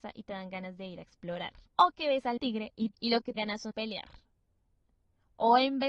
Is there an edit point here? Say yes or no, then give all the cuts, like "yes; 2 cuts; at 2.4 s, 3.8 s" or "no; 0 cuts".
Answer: yes; 5 cuts; at 1.7 s, 2.4 s, 2.9 s, 3.4 s, 3.7 s